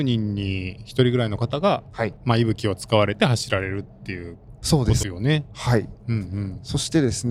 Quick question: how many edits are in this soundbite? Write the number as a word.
two